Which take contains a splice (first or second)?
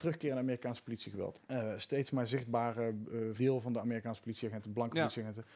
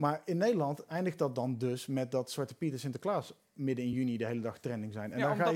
first